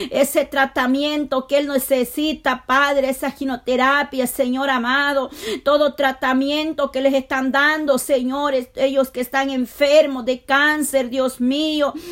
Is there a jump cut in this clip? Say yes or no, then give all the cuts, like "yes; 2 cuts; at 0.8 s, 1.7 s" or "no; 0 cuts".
no; 0 cuts